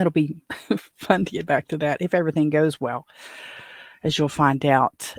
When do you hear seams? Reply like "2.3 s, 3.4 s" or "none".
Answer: none